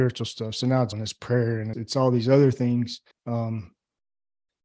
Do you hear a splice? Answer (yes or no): yes